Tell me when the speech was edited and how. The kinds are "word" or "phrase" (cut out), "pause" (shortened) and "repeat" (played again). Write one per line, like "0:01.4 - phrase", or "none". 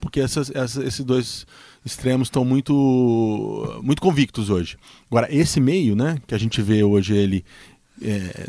none